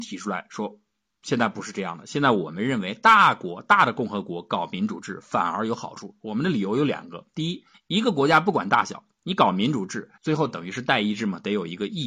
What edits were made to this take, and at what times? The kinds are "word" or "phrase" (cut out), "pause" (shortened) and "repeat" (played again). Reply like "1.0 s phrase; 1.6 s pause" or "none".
7.7 s phrase; 10.2 s pause